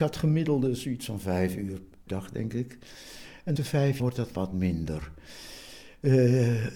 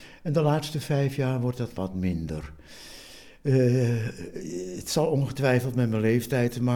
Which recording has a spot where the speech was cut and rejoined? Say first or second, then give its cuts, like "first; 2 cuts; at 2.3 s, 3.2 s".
first; 3 cuts; at 2.1 s, 3.6 s, 4.0 s